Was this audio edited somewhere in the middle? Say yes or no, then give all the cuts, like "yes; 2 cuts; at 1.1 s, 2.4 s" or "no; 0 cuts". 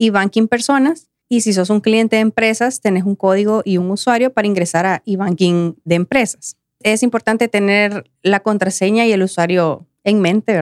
no; 0 cuts